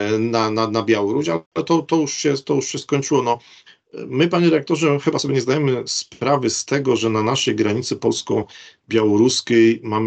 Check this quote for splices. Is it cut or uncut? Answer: uncut